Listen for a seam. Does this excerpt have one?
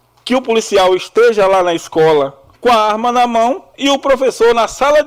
no; 0 cuts

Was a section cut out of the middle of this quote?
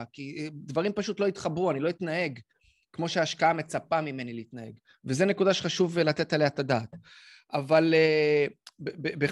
no; 0 cuts

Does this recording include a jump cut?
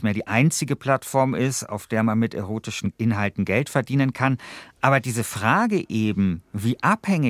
no; 0 cuts

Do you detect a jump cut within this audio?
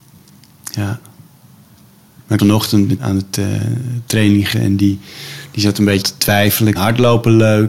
yes; 5 cuts; at 2.4 s, 3.0 s, 4.5 s, 6.0 s, 6.7 s

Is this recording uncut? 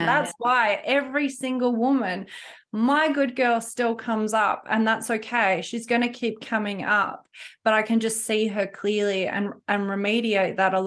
yes; 0 cuts

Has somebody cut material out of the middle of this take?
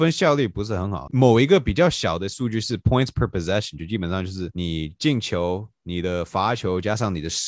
no; 0 cuts

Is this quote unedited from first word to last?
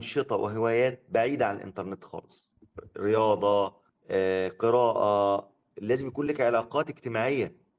yes; 0 cuts

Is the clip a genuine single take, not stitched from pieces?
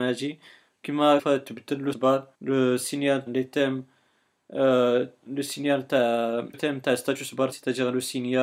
no; 6 cuts; at 1.2 s, 1.9 s, 2.3 s, 3.3 s, 6.5 s, 7.5 s

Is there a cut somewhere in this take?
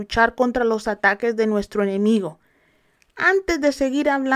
no; 0 cuts

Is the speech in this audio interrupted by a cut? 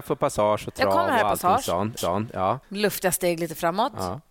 yes; 2 cuts; at 2.0 s, 2.6 s

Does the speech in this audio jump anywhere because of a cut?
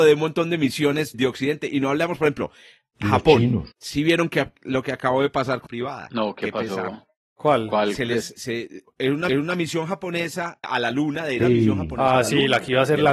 yes; 8 cuts; at 1.1 s, 3.7 s, 5.7 s, 8.3 s, 8.9 s, 9.3 s, 10.6 s, 11.4 s

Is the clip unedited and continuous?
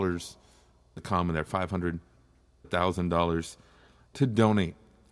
no; 2 cuts; at 1.0 s, 2.6 s

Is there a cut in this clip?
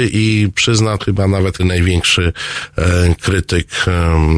yes; 2 cuts; at 1.0 s, 1.6 s

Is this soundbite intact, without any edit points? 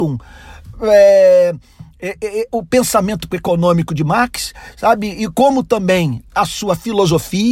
no; 1 cut; at 3.3 s

